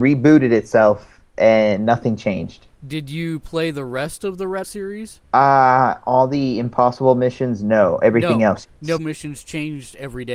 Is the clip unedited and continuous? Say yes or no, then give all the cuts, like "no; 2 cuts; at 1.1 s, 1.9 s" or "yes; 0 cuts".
no; 4 cuts; at 2.7 s, 4.6 s, 5.2 s, 9.0 s